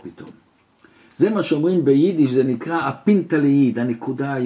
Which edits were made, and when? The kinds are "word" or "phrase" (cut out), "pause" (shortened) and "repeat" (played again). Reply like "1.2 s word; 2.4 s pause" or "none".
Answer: none